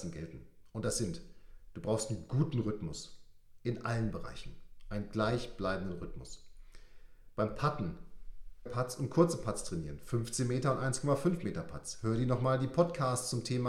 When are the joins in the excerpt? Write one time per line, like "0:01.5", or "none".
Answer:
0:08.7